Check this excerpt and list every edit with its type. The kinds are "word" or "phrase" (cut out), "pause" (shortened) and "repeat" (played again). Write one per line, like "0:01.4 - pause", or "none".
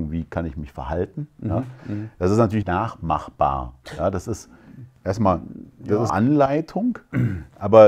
0:02.6 - word
0:06.1 - word